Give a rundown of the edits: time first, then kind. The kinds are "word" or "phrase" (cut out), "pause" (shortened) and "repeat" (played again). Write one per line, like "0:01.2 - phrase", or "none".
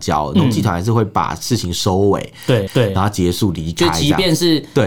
0:02.7 - repeat

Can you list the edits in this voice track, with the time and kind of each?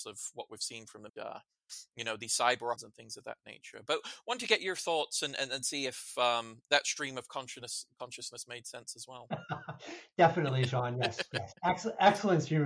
0:01.1 - phrase
0:02.8 - word

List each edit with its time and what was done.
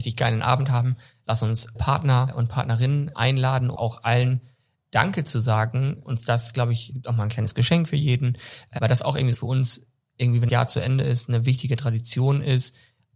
0:01.8 - word
0:03.1 - word
0:03.8 - word
0:06.0 - word
0:06.9 - word
0:09.3 - word
0:10.5 - word

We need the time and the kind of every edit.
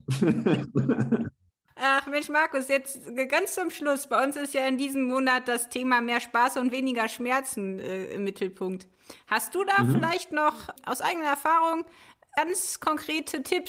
none

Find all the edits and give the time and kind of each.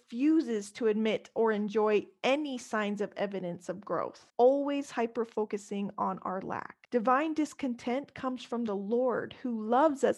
0:04.3 - pause
0:06.8 - pause

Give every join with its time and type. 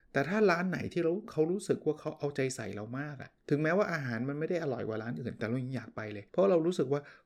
0:03.4 - pause
0:06.3 - pause

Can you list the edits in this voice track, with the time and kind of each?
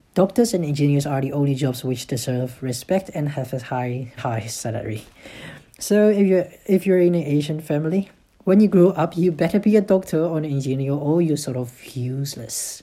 0:04.2 - word

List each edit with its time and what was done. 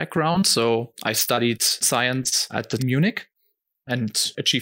0:01.8 - word
0:02.8 - phrase

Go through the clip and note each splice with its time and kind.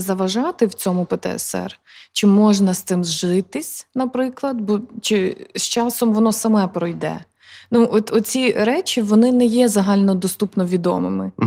none

